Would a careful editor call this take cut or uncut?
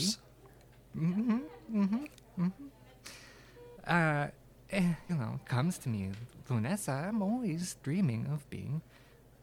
cut